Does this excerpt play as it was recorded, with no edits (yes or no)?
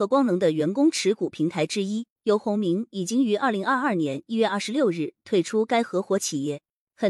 no